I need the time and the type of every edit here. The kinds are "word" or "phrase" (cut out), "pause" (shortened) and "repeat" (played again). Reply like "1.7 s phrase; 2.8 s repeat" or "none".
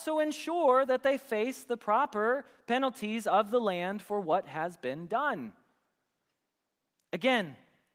none